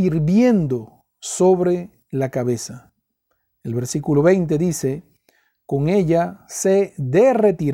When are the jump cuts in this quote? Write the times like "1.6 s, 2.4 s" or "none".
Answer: none

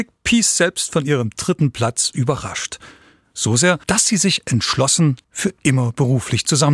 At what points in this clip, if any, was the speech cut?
3.8 s, 5.2 s

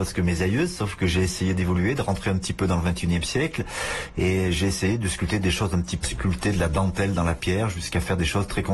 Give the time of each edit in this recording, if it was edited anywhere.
6.0 s

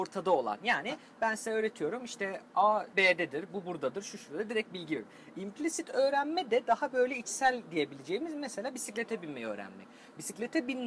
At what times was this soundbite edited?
2.9 s

